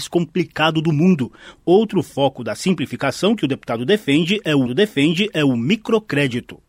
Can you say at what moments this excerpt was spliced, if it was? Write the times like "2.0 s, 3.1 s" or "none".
4.7 s

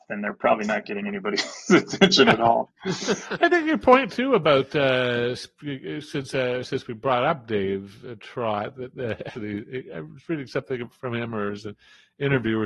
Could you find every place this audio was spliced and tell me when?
9.3 s

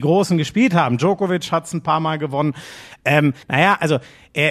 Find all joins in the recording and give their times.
3.4 s

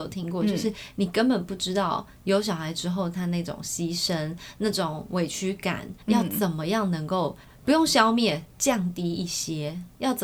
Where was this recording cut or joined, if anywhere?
6.0 s, 7.4 s

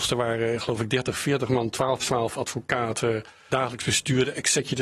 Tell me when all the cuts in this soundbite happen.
2.0 s, 3.5 s

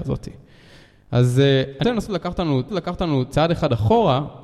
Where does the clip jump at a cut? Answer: 1.8 s, 2.7 s

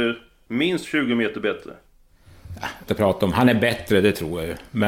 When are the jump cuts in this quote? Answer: 2.9 s

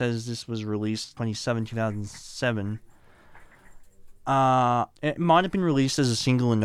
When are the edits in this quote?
1.2 s, 5.0 s

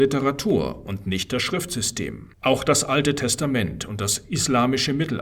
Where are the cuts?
2.3 s

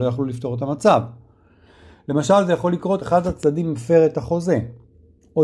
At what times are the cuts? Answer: 3.0 s

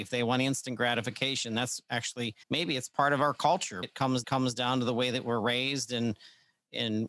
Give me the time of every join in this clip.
2.4 s, 3.8 s, 4.2 s

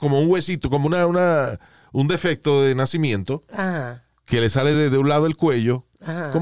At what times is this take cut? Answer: none

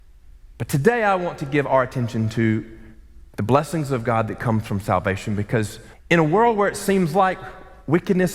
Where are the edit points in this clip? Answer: 5.9 s

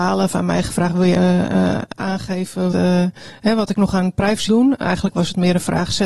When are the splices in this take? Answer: 1.2 s, 2.7 s, 4.5 s

